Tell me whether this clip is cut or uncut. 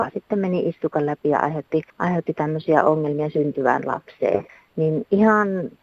cut